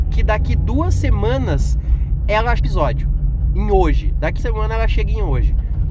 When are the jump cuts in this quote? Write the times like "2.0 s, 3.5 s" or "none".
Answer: 2.6 s, 4.4 s